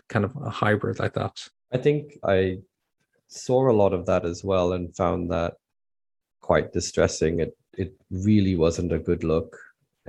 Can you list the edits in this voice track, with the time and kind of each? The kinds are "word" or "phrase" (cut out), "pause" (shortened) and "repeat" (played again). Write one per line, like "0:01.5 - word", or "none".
none